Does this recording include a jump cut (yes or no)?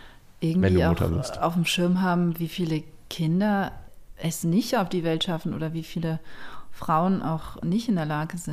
no